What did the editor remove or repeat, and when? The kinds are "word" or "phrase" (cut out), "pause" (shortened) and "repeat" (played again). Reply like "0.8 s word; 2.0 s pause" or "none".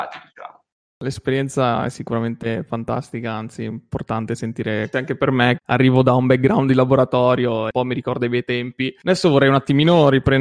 5.6 s word